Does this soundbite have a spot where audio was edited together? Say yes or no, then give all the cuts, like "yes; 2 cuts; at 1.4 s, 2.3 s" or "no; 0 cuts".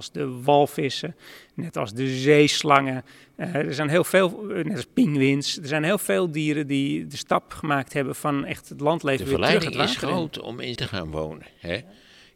yes; 1 cut; at 10.8 s